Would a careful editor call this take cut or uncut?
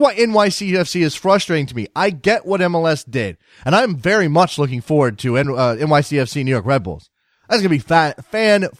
uncut